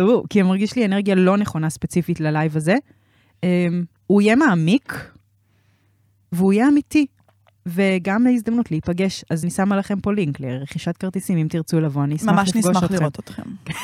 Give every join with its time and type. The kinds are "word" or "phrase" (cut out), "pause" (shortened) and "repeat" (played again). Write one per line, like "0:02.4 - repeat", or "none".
0:09.4 - word